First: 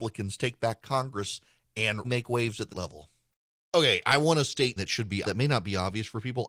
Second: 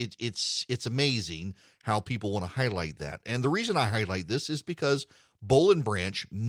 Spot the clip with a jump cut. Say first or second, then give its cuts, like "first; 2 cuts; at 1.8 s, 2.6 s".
first; 5 cuts; at 2.0 s, 2.7 s, 4.0 s, 4.8 s, 5.2 s